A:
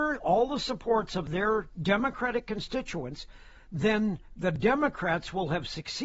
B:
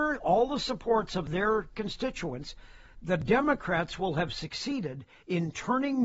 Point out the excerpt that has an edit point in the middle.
B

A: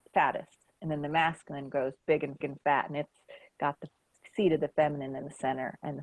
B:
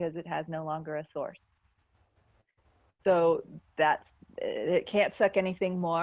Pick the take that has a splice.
A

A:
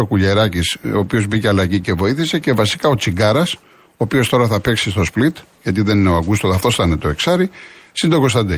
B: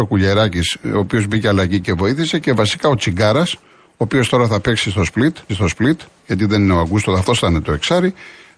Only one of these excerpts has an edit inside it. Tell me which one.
B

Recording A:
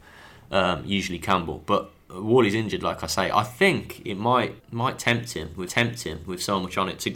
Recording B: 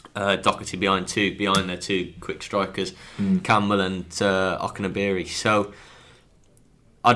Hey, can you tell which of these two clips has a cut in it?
A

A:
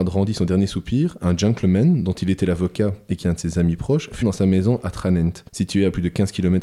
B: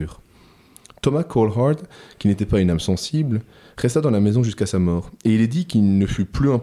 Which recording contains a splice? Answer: A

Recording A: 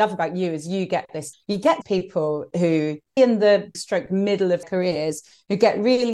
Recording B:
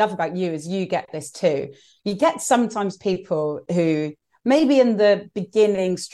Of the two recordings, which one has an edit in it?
A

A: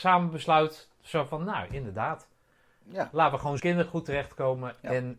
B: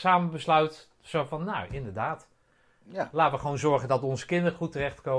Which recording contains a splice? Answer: A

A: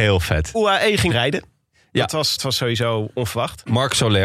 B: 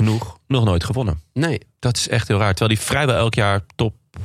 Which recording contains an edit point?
A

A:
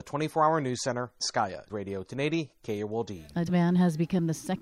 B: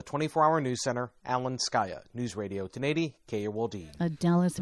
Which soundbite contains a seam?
A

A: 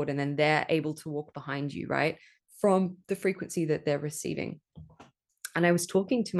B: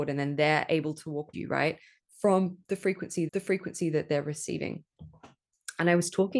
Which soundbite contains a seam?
B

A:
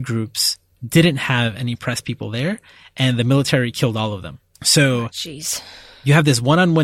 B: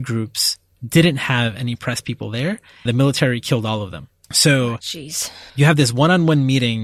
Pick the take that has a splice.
B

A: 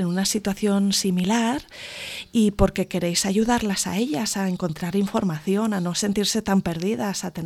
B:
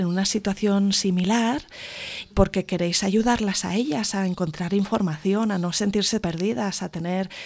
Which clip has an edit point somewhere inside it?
B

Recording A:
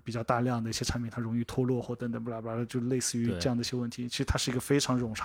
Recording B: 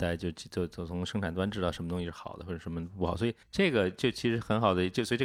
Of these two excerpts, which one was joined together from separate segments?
B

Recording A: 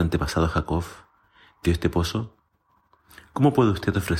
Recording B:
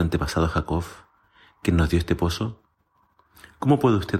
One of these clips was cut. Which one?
A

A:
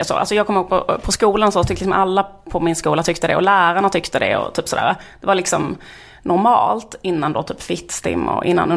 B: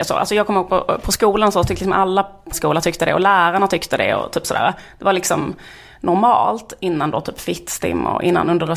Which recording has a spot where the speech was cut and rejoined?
B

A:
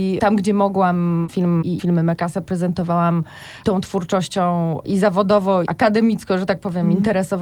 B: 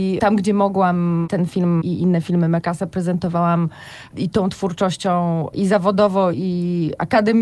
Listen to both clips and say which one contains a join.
A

